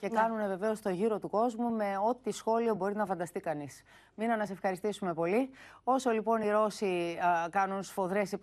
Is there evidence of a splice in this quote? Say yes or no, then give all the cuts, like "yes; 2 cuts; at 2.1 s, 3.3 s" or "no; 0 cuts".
no; 0 cuts